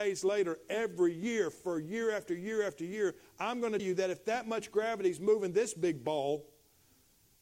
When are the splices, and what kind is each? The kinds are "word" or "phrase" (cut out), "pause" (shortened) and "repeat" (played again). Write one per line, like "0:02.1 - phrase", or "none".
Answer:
0:03.8 - word